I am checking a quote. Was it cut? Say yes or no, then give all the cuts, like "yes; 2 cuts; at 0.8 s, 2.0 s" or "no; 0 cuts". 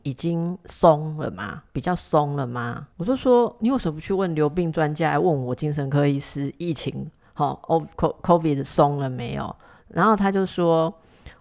yes; 1 cut; at 2.9 s